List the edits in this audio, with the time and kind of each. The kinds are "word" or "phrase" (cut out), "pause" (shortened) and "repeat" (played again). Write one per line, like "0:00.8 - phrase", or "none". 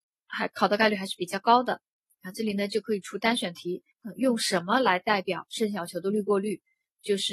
0:03.9 - pause